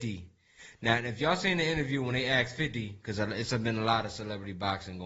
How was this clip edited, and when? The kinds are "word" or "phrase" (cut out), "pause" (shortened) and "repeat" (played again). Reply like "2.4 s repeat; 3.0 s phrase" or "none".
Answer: none